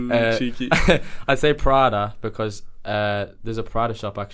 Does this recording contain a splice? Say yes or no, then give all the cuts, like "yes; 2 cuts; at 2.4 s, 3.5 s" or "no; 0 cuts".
no; 0 cuts